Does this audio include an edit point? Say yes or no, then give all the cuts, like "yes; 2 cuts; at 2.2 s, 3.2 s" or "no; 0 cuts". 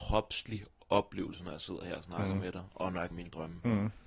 yes; 1 cut; at 3.1 s